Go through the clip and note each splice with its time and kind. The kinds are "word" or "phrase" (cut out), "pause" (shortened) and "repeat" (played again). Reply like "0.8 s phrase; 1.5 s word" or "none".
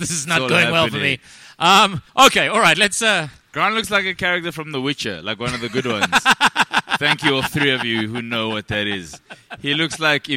2.1 s pause